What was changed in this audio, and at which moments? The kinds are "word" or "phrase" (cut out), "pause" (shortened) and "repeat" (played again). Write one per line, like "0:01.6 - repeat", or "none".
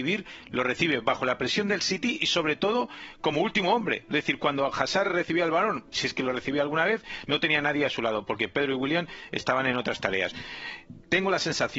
none